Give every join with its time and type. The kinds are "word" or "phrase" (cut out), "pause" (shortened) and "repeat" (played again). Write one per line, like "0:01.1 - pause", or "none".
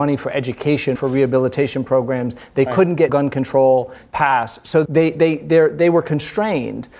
0:00.9 - word
0:03.1 - word
0:04.8 - word